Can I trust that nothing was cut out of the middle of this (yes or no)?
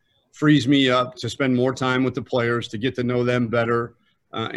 no